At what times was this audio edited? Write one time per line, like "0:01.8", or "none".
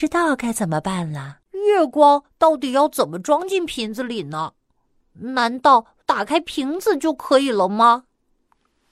0:01.4
0:06.0